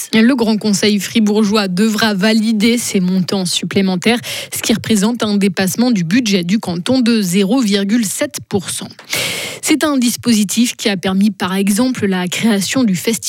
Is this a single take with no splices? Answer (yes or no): yes